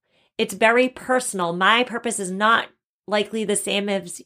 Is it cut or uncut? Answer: uncut